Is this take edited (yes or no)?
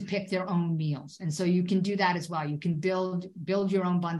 no